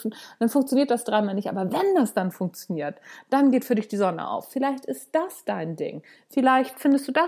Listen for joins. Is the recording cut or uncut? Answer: uncut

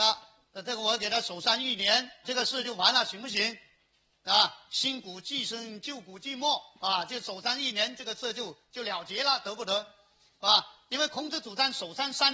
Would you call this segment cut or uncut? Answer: cut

